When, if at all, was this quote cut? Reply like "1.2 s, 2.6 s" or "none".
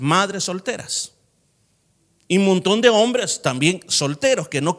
none